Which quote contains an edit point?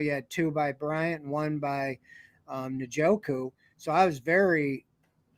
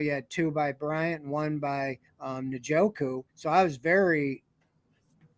second; 2 cuts; at 2.0 s, 3.3 s

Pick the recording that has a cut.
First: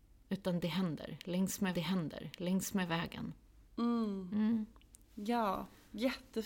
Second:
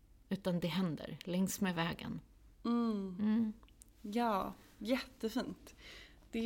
first; 1 cut; at 1.7 s

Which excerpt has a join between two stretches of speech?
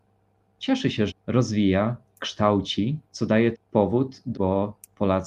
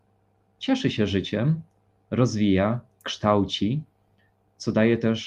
first; 4 cuts; at 1.1 s, 3.1 s, 3.5 s, 4.3 s

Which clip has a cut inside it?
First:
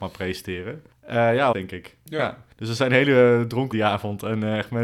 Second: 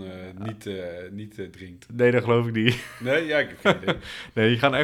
first; 4 cuts; at 0.9 s, 1.5 s, 2.5 s, 3.7 s

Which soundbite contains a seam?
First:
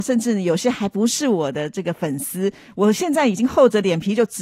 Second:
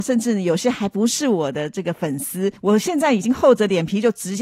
second; 1 cut; at 2.6 s

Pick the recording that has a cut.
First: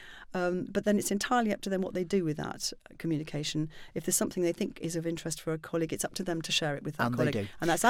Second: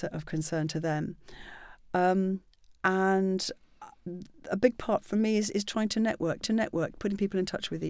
second; 1 cut; at 6.4 s

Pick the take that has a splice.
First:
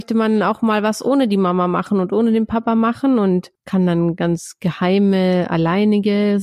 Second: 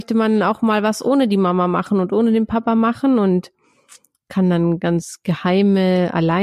first; 1 cut; at 3.6 s

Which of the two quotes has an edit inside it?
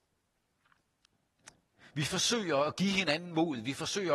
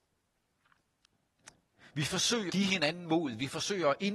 second; 1 cut; at 2.5 s

